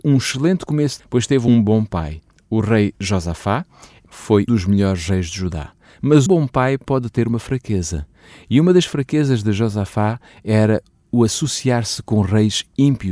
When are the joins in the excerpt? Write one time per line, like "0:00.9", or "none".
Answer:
0:01.0
0:04.5
0:06.3